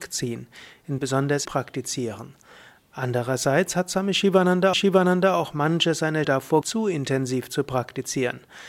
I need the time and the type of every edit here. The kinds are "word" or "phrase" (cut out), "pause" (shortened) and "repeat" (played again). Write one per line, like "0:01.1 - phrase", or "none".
0:01.0 - phrase
0:01.4 - word
0:04.7 - repeat
0:06.2 - word
0:06.6 - word

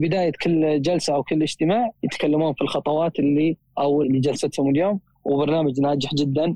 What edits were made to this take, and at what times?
0:02.0 - pause
0:04.0 - phrase

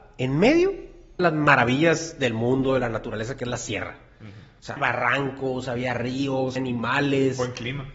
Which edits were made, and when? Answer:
0:01.2 - phrase
0:04.8 - word
0:06.6 - word

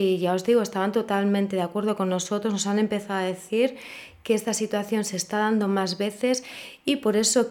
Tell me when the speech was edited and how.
none

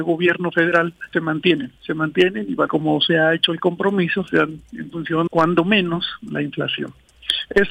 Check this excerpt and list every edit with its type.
0:01.1 - word
0:01.8 - pause
0:02.7 - phrase
0:05.3 - word

